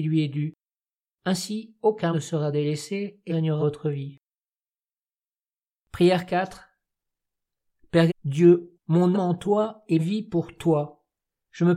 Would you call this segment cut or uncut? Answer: cut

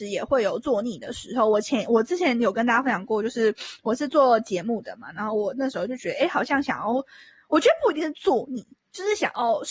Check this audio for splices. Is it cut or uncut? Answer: uncut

